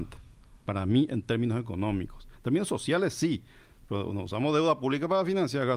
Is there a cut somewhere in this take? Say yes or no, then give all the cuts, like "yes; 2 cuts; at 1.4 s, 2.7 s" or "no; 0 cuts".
no; 0 cuts